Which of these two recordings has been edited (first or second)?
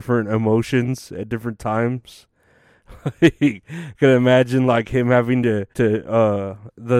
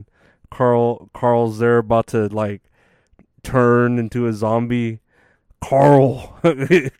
first